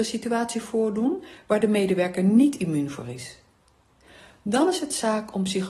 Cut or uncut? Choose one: uncut